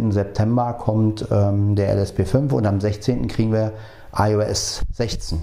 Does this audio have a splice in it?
no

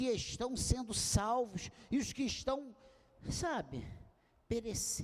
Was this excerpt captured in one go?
yes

